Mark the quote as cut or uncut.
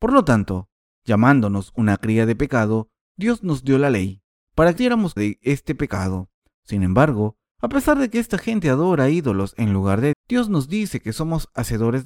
cut